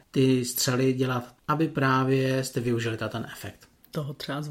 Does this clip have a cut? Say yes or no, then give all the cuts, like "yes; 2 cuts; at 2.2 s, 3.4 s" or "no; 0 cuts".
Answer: yes; 1 cut; at 1.4 s